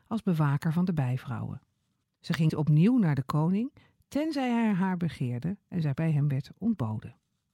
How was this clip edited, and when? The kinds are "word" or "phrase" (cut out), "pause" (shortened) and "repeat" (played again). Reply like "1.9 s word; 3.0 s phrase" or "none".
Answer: 2.0 s pause; 2.5 s word; 6.0 s word